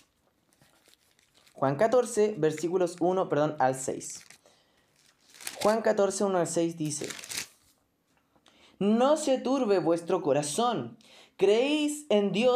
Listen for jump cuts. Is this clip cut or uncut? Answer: uncut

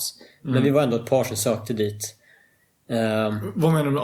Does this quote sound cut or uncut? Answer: uncut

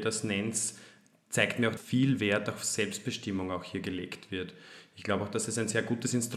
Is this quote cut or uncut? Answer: cut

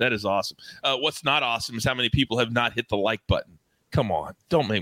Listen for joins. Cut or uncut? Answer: uncut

